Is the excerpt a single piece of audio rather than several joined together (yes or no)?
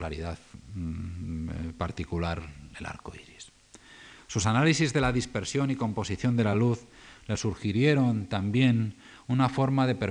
yes